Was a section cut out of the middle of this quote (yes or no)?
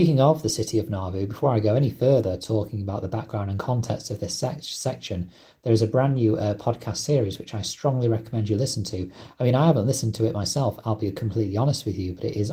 no